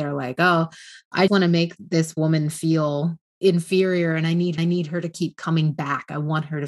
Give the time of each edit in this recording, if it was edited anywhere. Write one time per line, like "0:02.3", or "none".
0:01.3
0:01.8
0:03.3
0:04.6